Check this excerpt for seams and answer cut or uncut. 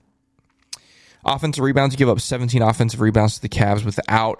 uncut